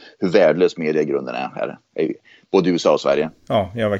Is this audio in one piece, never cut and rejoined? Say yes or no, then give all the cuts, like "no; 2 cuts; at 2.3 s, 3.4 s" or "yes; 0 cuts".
yes; 0 cuts